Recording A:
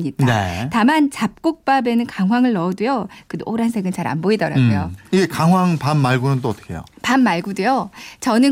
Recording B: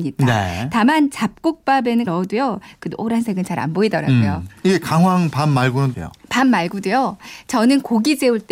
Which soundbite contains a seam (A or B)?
B